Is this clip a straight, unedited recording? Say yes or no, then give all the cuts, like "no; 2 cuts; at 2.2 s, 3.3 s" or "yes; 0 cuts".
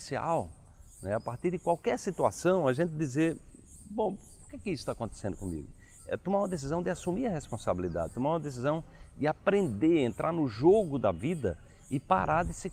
yes; 0 cuts